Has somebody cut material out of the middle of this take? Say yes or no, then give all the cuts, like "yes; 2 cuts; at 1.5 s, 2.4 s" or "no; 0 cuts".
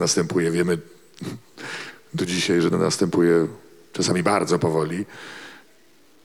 no; 0 cuts